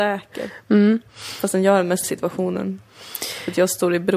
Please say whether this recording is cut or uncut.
cut